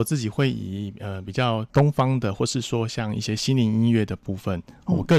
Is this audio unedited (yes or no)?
no